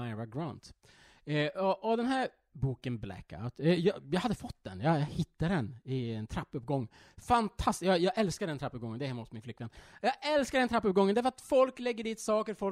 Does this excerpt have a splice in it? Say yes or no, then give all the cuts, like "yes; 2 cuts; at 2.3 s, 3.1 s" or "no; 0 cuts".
no; 0 cuts